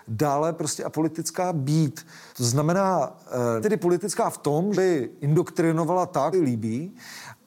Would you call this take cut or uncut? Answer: cut